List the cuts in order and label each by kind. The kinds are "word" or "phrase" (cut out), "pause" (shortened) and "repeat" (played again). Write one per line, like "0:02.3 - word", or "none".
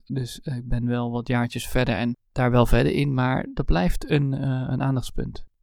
0:02.3 - pause